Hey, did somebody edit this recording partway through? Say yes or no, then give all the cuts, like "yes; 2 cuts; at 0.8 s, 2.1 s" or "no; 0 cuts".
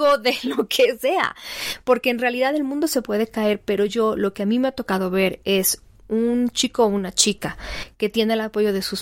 no; 0 cuts